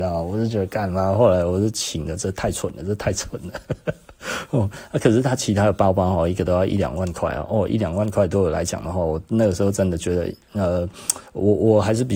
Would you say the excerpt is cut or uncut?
uncut